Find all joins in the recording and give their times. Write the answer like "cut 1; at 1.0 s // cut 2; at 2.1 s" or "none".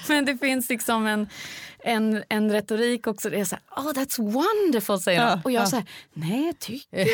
none